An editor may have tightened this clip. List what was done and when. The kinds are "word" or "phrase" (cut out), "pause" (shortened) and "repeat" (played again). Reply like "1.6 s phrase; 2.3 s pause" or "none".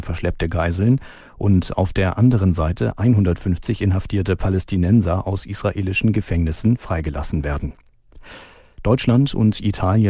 none